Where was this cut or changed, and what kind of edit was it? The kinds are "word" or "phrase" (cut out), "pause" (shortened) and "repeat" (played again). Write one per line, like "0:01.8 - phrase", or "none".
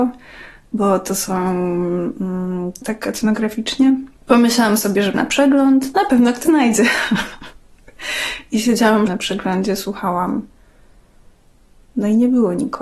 0:02.8 - phrase
0:04.2 - pause
0:05.1 - word
0:06.5 - word
0:09.1 - phrase

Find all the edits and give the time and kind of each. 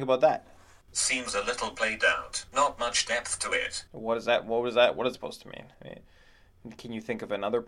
0:02.5 - pause
0:03.9 - pause
0:05.1 - word
0:05.7 - pause

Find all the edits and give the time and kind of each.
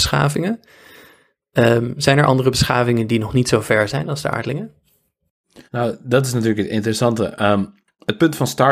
0:05.7 - pause

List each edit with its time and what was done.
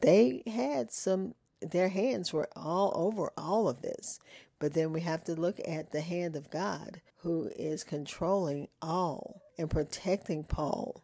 0:07.1 - pause
0:09.5 - pause

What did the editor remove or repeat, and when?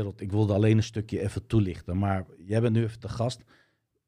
none

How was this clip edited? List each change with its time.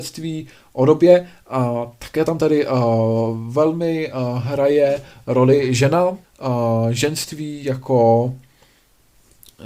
0:06.2 - pause

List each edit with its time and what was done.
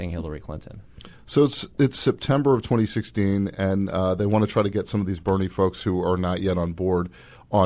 none

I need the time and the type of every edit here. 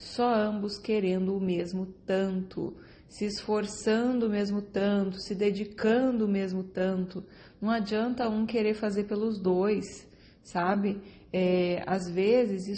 none

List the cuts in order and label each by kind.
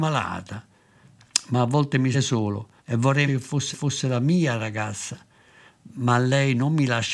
0:02.1 - phrase
0:02.8 - pause
0:03.3 - word
0:03.7 - repeat

